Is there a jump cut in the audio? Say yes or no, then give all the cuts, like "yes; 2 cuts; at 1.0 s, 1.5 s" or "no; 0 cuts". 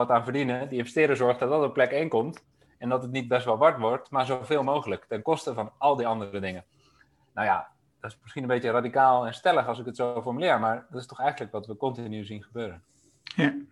no; 0 cuts